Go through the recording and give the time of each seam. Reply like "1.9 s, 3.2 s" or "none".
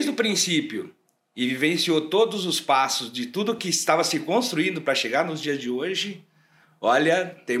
none